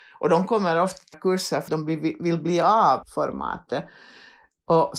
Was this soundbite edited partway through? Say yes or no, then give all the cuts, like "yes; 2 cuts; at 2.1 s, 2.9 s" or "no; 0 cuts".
yes; 3 cuts; at 1.1 s, 1.7 s, 3.0 s